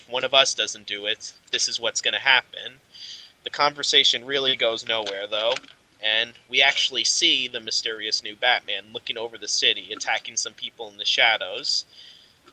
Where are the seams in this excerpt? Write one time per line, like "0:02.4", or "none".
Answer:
none